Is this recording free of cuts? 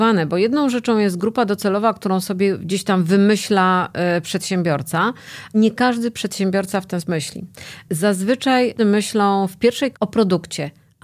no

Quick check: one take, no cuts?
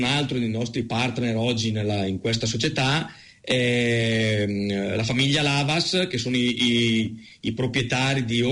yes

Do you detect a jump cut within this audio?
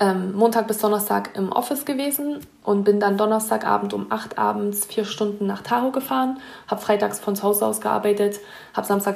no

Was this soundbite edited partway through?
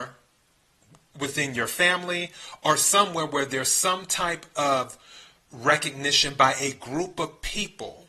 no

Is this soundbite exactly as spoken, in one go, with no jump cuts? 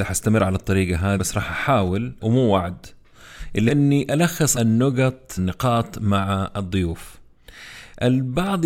no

